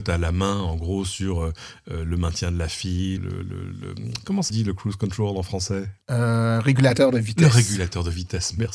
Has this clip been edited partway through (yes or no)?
yes